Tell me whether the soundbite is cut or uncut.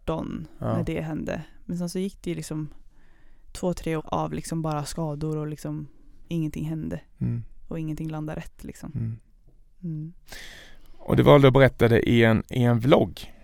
cut